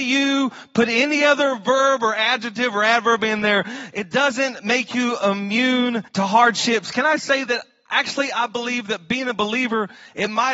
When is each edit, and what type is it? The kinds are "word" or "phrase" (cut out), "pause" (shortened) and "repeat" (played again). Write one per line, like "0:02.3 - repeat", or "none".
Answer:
0:06.1 - pause